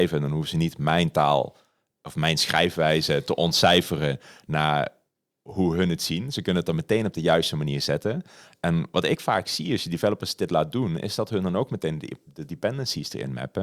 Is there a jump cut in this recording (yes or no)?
no